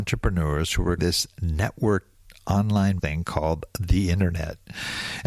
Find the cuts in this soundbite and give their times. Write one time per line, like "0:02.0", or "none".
0:01.0
0:03.0